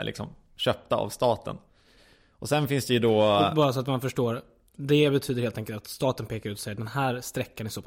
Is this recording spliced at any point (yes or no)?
no